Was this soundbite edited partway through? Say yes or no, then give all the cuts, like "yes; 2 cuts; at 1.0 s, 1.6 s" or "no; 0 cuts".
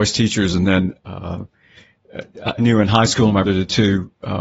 yes; 2 cuts; at 2.6 s, 3.4 s